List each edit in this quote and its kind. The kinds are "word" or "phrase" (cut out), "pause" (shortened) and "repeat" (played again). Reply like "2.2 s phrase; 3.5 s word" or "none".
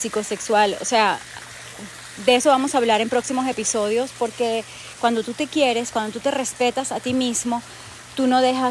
none